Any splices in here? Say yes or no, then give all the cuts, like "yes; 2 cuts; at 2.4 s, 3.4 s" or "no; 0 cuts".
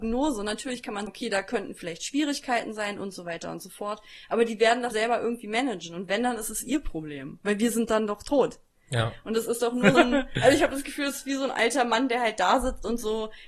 yes; 3 cuts; at 1.1 s, 4.9 s, 9.9 s